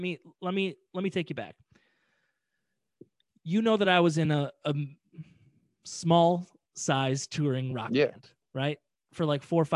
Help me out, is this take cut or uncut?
uncut